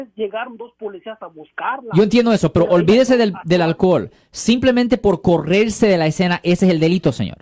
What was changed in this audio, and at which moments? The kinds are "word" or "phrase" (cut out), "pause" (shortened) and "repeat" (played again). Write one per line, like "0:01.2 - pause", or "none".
none

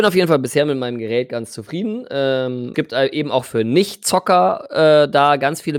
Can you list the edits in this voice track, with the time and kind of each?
0:02.7 - word

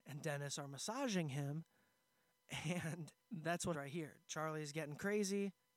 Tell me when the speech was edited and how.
0:03.2 - pause
0:03.7 - word

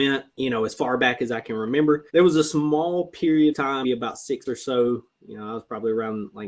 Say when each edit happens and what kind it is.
0:02.1 - pause
0:03.5 - word
0:03.8 - word
0:04.5 - word

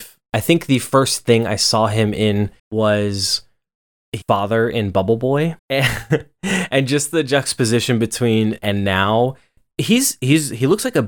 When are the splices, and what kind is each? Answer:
0:02.6 - pause
0:04.2 - phrase
0:05.6 - pause
0:08.6 - word

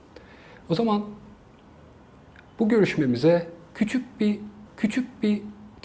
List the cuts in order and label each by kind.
0:04.7 - repeat

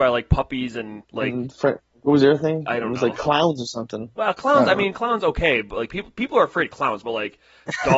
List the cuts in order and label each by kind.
0:01.0 - pause

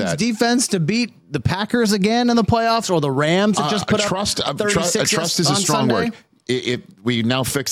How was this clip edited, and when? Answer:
none

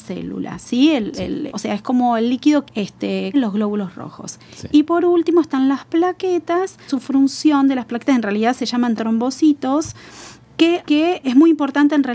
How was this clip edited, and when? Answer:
0:01.5 - word
0:02.7 - word
0:03.3 - word
0:06.9 - word
0:09.0 - word
0:10.8 - word
0:11.2 - word

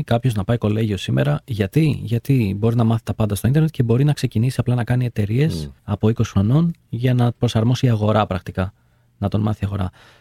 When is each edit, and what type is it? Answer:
0:05.8 - pause
0:07.4 - word

